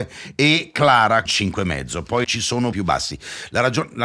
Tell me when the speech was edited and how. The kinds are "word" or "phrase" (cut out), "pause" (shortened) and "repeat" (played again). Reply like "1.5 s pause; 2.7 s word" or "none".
1.3 s word; 2.2 s word; 2.7 s word